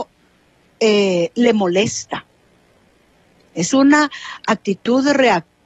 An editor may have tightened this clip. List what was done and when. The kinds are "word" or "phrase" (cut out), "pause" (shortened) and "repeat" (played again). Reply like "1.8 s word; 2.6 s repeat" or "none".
3.7 s word